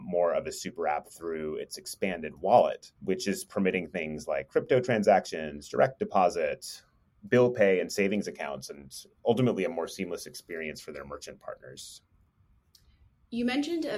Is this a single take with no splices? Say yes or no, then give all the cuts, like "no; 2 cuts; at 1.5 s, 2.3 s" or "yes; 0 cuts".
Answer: no; 1 cut; at 3.0 s